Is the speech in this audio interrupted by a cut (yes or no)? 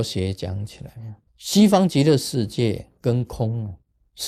yes